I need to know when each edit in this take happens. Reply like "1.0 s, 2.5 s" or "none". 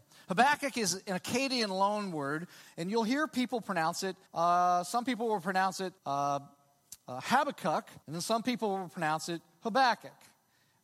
4.3 s, 6.0 s, 8.0 s